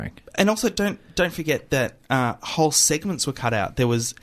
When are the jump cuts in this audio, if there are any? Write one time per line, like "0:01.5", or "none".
none